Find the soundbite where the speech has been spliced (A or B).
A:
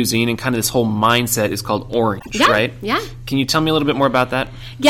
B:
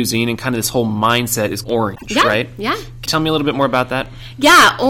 B